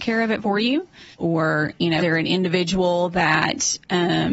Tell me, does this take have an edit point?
yes; 2 cuts; at 1.1 s, 2.0 s

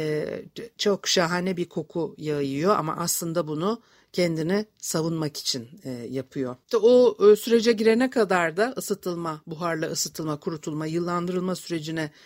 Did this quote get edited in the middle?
yes; 1 cut; at 6.6 s

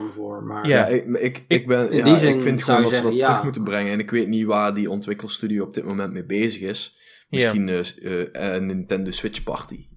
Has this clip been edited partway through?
no; 0 cuts

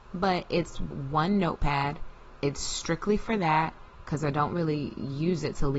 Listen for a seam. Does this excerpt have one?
yes; 1 cut; at 0.9 s

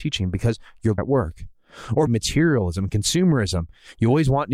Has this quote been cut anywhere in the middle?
yes; 2 cuts; at 1.0 s, 2.1 s

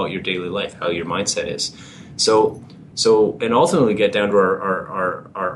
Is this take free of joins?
yes; 0 cuts

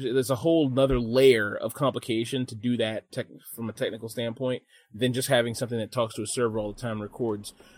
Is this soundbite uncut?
yes; 0 cuts

